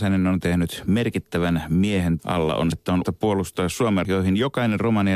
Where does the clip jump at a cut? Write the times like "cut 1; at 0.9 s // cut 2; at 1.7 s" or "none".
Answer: cut 1; at 2.2 s // cut 2; at 2.7 s // cut 3; at 3.0 s // cut 4; at 4.0 s